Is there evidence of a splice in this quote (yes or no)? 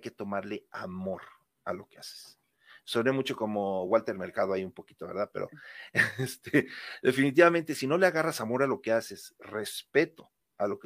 no